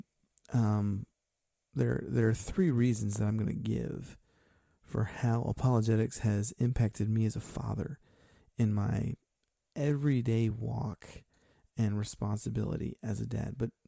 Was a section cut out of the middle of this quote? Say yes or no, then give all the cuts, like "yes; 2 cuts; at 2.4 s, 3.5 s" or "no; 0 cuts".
no; 0 cuts